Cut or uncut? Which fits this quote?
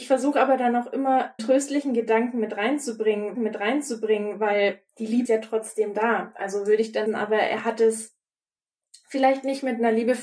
cut